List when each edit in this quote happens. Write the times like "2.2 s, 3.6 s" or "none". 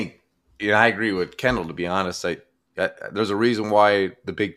none